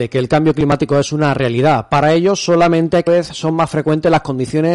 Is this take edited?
yes; 1 cut; at 3.1 s

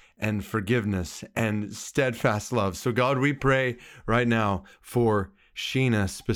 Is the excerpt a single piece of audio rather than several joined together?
yes; 0 cuts

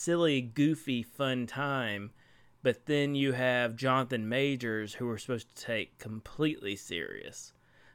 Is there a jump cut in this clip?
no; 0 cuts

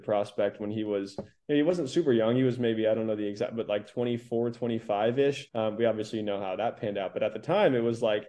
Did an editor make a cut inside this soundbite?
yes; 1 cut; at 5.5 s

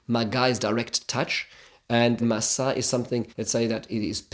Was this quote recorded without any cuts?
no; 2 cuts; at 2.2 s, 3.3 s

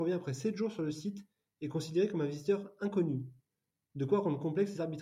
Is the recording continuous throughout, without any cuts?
yes; 0 cuts

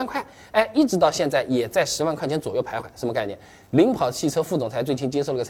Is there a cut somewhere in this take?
no; 0 cuts

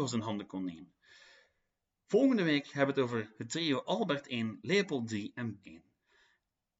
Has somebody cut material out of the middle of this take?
yes; 1 cut; at 5.6 s

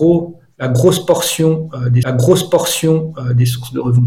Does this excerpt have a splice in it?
yes; 1 cut; at 2.0 s

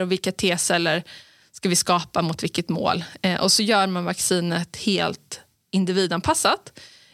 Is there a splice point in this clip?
no; 0 cuts

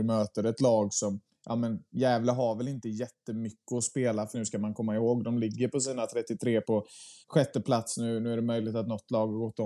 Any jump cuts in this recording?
yes; 4 cuts; at 1.3 s, 4.3 s, 6.6 s, 7.2 s

